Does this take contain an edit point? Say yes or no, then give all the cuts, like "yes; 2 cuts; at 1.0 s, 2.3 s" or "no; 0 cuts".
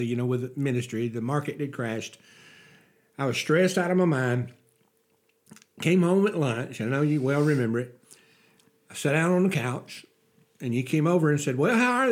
no; 0 cuts